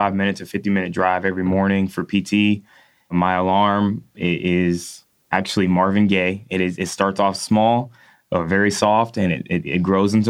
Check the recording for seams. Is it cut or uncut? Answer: uncut